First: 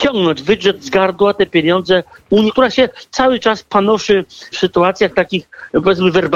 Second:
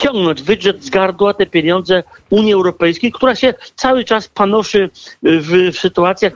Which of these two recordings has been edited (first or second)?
first